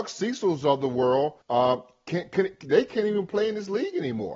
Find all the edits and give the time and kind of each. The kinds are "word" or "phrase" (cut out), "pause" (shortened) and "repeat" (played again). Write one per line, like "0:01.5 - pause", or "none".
0:01.4 - pause